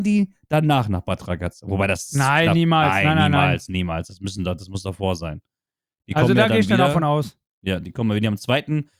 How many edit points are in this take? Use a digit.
0